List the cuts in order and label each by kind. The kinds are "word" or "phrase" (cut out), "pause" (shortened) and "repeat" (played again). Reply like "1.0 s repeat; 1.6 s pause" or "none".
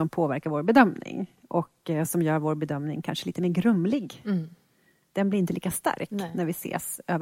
none